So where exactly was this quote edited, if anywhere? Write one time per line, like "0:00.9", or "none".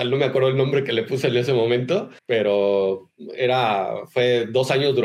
0:02.2